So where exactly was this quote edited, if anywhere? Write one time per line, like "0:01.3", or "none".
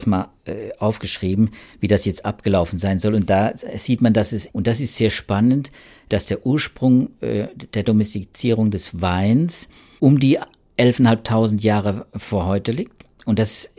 0:04.5
0:10.0